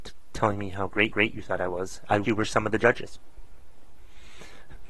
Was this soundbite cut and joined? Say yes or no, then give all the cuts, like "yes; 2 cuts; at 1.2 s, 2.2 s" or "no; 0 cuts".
yes; 2 cuts; at 1.1 s, 2.2 s